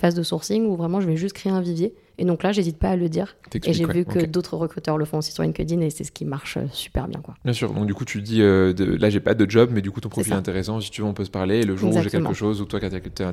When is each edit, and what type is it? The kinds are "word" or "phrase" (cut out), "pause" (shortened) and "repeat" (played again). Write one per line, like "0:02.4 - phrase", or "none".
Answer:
0:07.4 - pause